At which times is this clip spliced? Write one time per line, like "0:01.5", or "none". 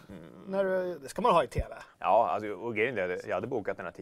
0:01.9